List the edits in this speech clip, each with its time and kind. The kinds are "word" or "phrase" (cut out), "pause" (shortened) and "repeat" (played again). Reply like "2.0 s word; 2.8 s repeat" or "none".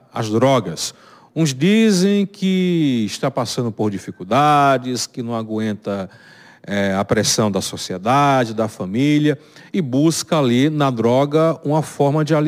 none

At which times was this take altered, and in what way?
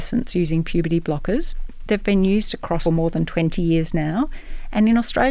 2.8 s phrase

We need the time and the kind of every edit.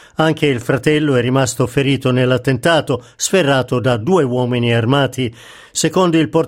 none

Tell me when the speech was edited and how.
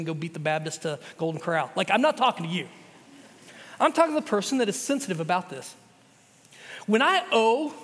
none

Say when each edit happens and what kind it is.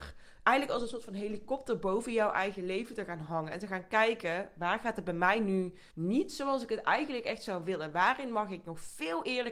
5.9 s pause

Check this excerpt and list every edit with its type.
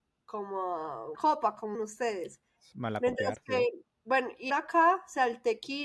1.1 s word; 1.7 s word; 3.9 s pause; 4.5 s phrase

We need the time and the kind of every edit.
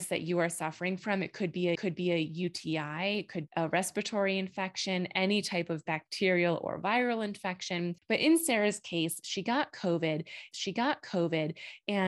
1.8 s repeat; 3.5 s word; 8.0 s pause; 10.5 s repeat

